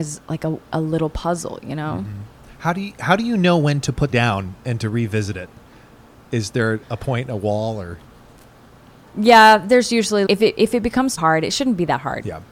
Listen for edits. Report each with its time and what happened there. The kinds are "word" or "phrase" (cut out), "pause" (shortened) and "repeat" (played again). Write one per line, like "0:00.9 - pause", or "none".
0:04.1 - word
0:06.8 - word
0:10.3 - word
0:11.2 - word